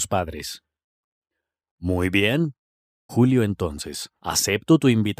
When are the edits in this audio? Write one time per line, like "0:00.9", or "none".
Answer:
0:03.1
0:04.2